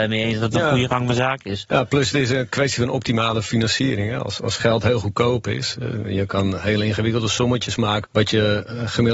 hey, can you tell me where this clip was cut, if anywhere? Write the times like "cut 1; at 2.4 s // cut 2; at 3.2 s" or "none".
cut 1; at 8.0 s